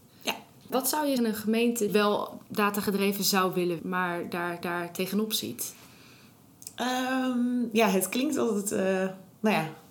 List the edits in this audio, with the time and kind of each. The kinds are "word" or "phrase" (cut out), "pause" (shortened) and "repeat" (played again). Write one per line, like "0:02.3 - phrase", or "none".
0:01.2 - phrase
0:01.9 - phrase
0:02.5 - pause
0:03.8 - word
0:04.6 - repeat